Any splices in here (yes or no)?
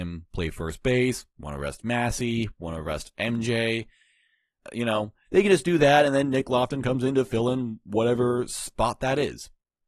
no